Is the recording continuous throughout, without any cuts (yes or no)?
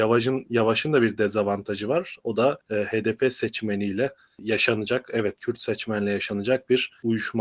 yes